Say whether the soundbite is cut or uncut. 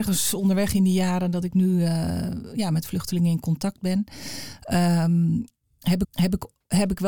cut